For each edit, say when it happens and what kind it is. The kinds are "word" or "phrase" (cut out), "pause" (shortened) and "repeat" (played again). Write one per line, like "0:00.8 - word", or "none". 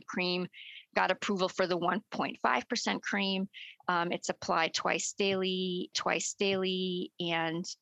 0:05.9 - repeat